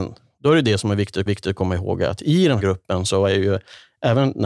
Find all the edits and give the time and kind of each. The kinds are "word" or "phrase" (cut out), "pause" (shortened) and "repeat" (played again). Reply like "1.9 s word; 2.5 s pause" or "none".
1.3 s repeat; 2.6 s word